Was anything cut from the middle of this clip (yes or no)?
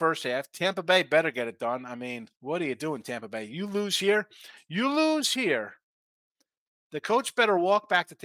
yes